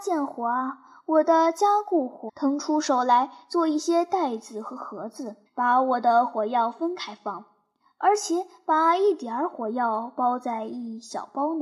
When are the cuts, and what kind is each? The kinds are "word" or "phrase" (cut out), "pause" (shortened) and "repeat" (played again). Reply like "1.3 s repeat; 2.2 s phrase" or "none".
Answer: 2.3 s word; 5.5 s pause